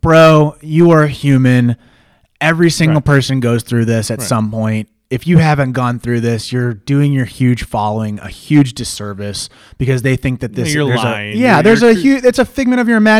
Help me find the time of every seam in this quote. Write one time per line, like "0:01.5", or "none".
none